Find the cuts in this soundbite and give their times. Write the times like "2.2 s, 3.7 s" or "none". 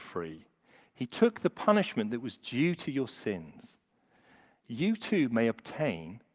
none